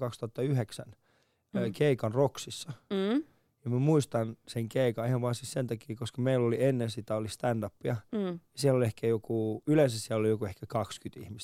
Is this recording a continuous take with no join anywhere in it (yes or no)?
yes